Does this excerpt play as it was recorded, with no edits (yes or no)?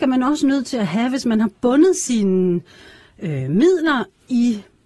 yes